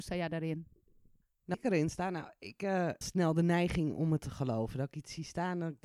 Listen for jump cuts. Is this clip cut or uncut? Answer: cut